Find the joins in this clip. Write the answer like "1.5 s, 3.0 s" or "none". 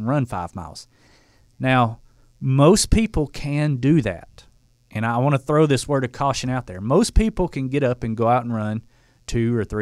none